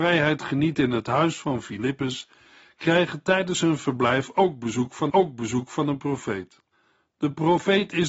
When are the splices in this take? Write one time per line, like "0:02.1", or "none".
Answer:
0:05.1
0:06.7